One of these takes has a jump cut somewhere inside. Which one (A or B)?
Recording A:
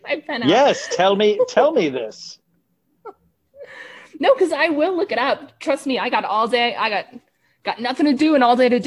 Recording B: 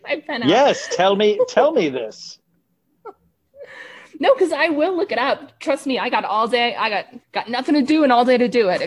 B